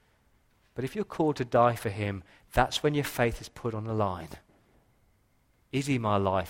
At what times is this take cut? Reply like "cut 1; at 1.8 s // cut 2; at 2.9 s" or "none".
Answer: none